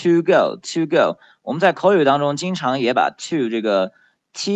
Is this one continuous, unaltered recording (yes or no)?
yes